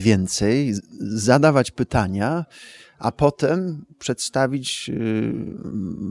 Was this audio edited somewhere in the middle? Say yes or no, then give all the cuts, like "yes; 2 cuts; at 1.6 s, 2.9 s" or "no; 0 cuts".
no; 0 cuts